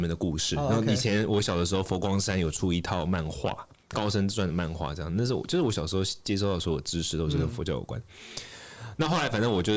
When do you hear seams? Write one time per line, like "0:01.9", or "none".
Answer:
none